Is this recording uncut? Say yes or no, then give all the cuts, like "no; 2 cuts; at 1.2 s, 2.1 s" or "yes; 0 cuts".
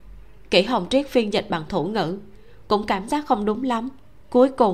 yes; 0 cuts